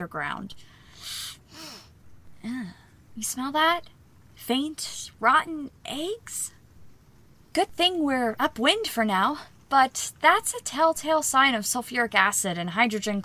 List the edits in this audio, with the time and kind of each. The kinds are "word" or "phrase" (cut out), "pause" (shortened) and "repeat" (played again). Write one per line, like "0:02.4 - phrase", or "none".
none